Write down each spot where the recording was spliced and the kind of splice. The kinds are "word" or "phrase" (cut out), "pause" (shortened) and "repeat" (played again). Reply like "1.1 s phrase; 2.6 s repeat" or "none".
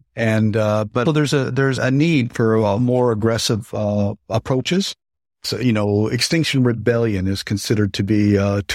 1.1 s word; 1.8 s word; 5.4 s word